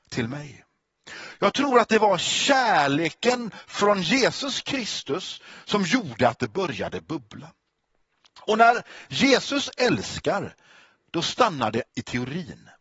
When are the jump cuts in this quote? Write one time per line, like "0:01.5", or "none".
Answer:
0:11.9